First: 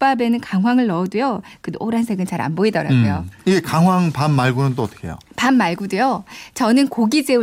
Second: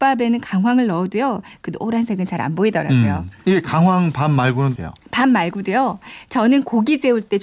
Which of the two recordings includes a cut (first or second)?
second